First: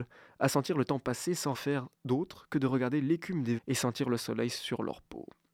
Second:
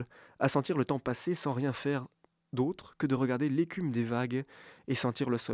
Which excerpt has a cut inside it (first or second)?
first